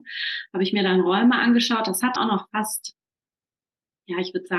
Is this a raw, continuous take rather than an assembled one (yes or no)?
no